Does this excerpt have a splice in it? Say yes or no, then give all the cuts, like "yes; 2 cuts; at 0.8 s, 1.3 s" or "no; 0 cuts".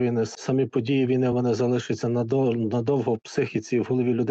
no; 0 cuts